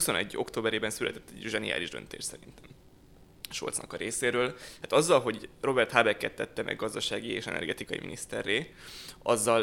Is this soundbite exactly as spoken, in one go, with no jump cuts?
yes; 0 cuts

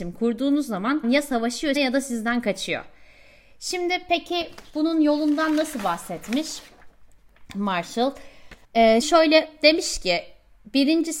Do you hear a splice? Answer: yes; 4 cuts; at 1.0 s, 1.8 s, 8.6 s, 9.0 s

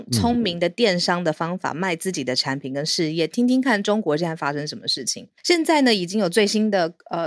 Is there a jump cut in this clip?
yes; 1 cut; at 5.4 s

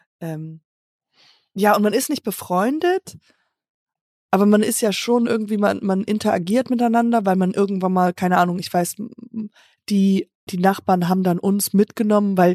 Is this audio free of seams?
no; 1 cut; at 10.5 s

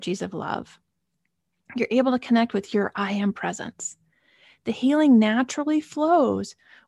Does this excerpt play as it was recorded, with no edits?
yes; 0 cuts

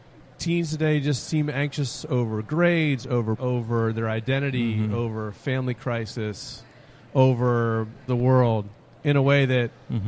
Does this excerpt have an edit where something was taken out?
yes; 2 cuts; at 3.4 s, 8.1 s

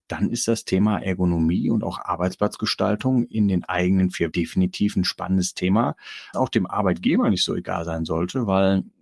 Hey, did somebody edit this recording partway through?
yes; 2 cuts; at 4.3 s, 6.3 s

